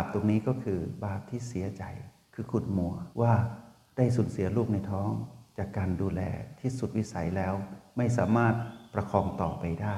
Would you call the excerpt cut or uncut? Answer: cut